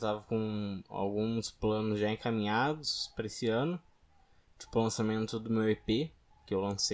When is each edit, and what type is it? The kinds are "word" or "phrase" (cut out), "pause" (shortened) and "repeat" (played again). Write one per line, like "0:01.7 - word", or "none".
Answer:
none